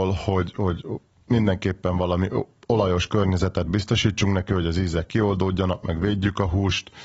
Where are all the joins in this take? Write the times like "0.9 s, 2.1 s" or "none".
none